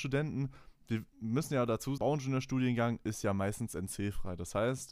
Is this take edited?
yes; 1 cut; at 2.0 s

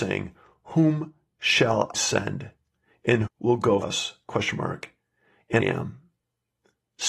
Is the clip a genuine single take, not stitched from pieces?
no; 4 cuts; at 1.9 s, 3.3 s, 3.8 s, 5.6 s

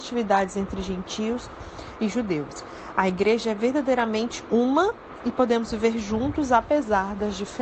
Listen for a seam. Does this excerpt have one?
no; 0 cuts

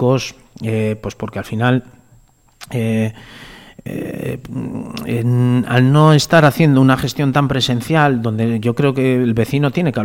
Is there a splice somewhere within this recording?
no; 0 cuts

